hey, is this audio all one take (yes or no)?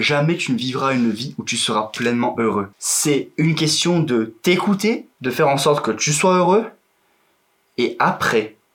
no